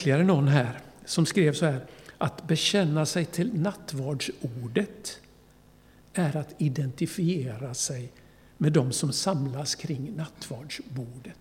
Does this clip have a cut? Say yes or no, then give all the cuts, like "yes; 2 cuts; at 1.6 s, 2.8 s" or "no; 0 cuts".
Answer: no; 0 cuts